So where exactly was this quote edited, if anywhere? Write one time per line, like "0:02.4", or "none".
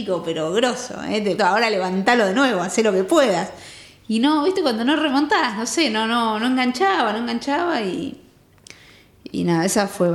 0:01.4